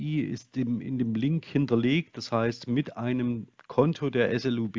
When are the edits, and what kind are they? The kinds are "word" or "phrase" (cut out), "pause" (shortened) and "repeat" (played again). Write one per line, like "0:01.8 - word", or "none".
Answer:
none